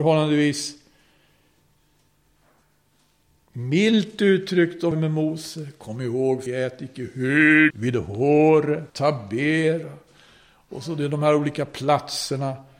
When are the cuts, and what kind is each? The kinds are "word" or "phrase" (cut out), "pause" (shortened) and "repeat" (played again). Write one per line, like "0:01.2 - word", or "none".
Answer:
0:04.9 - word
0:06.5 - word
0:07.7 - phrase
0:08.9 - pause